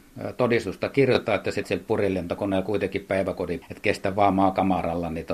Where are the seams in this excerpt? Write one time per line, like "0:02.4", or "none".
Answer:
0:01.6
0:03.6

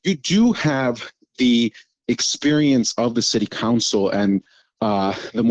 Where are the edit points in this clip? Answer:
none

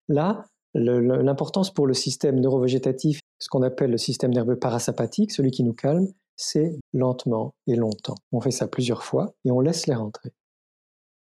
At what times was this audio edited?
0:03.2
0:06.8
0:08.2

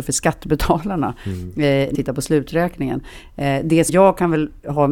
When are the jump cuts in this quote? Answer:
0:01.9
0:03.9

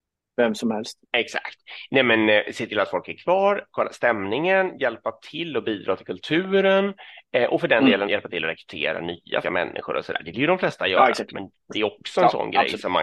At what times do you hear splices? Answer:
0:01.1
0:08.1
0:09.4
0:10.3

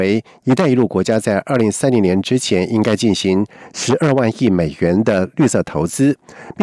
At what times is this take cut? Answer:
none

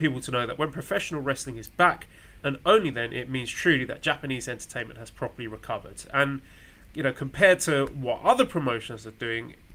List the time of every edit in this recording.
0:02.4

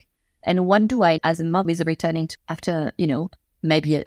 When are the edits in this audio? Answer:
0:01.2
0:01.6
0:02.3

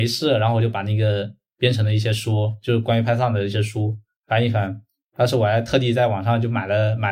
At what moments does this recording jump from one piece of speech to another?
none

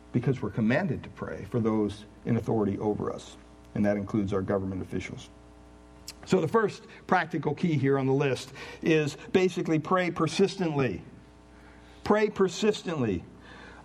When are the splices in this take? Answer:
none

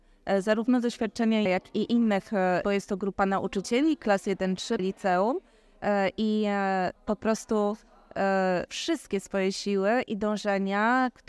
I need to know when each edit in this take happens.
0:01.5
0:02.6
0:04.8
0:07.0
0:08.7

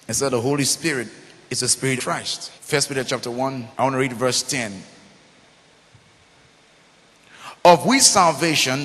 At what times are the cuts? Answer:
0:02.0
0:02.6
0:03.7

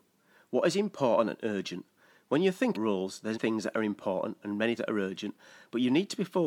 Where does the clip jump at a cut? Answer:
0:02.7
0:03.3
0:04.8

